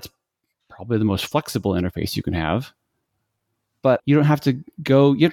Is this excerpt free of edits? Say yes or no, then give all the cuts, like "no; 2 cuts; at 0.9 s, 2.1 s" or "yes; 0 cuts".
no; 1 cut; at 4.0 s